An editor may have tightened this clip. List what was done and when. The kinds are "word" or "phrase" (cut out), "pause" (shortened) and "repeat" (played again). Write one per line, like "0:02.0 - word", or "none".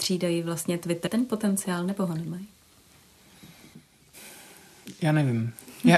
0:01.1 - word